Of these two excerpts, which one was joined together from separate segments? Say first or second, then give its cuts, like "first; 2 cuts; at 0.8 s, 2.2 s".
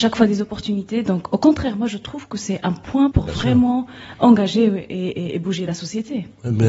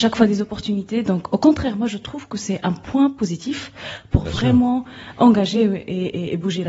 first; 1 cut; at 3.1 s